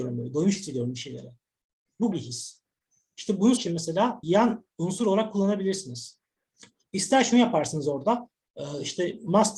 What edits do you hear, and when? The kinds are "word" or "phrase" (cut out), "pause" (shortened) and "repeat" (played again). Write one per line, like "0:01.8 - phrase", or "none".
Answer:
0:02.1 - word
0:03.6 - word
0:04.2 - word